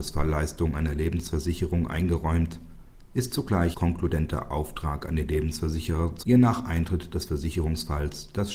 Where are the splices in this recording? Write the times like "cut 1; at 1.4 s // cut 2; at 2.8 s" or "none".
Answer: cut 1; at 3.7 s // cut 2; at 6.2 s